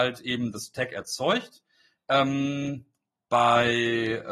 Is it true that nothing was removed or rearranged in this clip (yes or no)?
yes